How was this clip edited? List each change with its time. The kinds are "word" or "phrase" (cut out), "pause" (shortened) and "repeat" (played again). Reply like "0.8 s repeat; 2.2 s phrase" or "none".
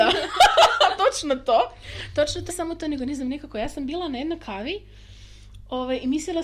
1.0 s word; 2.5 s word